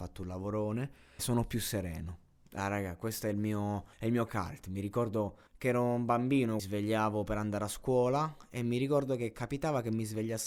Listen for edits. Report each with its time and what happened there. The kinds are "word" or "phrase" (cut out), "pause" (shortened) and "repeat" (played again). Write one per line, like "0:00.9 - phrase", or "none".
0:01.2 - word
0:03.9 - pause
0:05.5 - pause
0:06.6 - phrase